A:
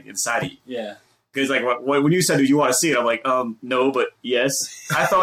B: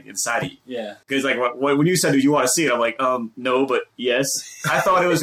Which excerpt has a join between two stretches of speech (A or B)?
B